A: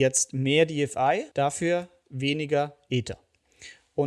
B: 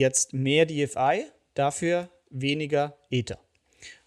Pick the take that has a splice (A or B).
A